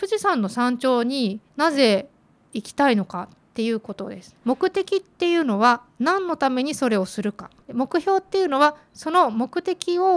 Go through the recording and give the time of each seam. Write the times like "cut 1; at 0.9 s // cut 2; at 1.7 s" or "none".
cut 1; at 1.5 s // cut 2; at 4.4 s // cut 3; at 7.6 s